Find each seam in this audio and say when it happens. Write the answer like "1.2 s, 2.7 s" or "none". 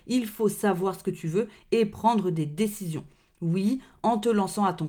none